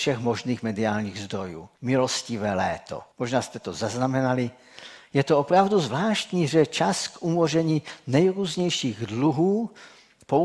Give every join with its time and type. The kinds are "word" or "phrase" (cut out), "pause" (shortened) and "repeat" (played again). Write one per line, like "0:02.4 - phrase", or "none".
0:01.8 - pause
0:03.1 - pause